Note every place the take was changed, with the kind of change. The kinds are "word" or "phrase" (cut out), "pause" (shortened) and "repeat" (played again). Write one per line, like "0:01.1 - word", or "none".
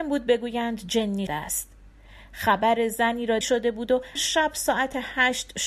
0:01.3 - word
0:03.4 - phrase
0:04.2 - word

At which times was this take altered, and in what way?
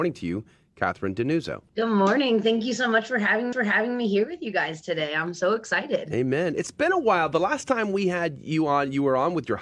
0:01.7 - pause
0:03.5 - repeat

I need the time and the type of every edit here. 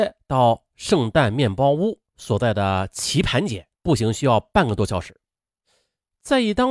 0:02.1 - pause
0:03.7 - pause

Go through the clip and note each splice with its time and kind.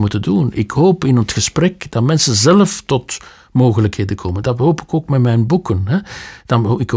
none

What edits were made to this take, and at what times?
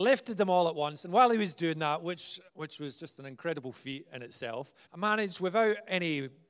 0:02.5 - pause
0:04.8 - pause

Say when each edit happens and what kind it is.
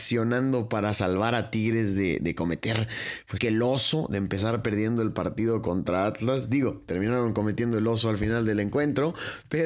0:03.4 - phrase

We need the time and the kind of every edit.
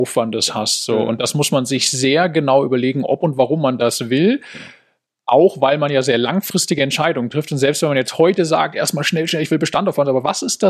none

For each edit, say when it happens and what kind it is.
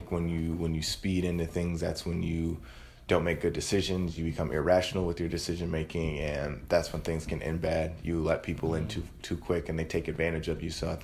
none

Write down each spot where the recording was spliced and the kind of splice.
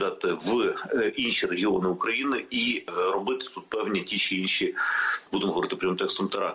none

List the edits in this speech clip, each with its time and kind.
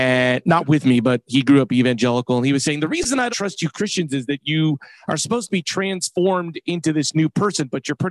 0:03.3 - word

